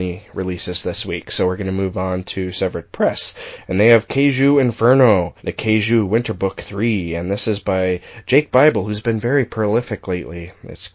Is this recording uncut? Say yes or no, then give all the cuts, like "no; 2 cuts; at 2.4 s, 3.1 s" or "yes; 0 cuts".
no; 1 cut; at 5.4 s